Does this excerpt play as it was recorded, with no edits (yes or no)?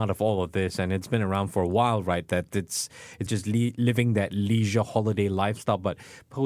no